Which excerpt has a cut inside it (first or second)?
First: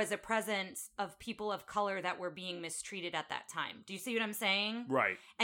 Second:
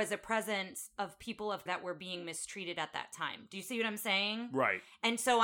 second